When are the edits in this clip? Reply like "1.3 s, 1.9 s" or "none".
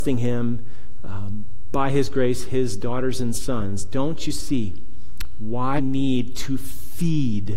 5.8 s

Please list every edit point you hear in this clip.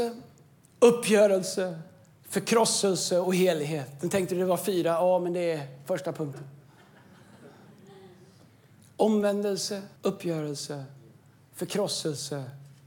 10.0 s

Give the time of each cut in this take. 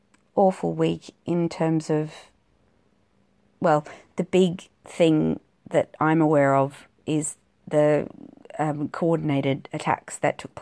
none

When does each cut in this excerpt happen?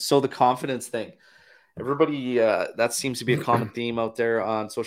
none

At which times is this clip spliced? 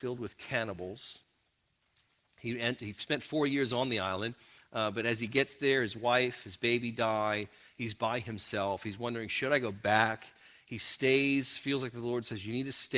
none

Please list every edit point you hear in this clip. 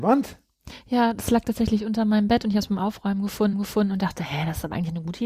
3.5 s

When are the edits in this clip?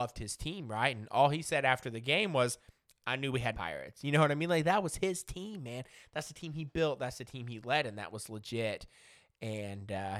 3.5 s

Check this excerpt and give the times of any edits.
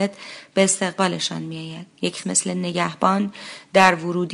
2.2 s

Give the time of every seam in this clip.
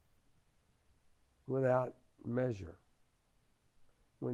none

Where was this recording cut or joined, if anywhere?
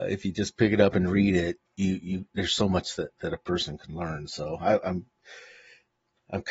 1.7 s

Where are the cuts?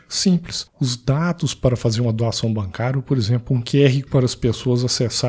4.1 s

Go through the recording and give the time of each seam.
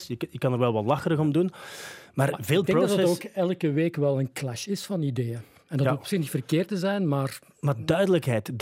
none

